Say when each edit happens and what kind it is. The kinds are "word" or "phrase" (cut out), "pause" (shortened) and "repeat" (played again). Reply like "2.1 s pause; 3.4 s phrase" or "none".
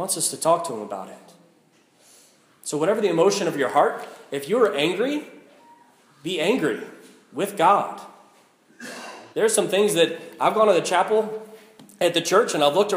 9.3 s pause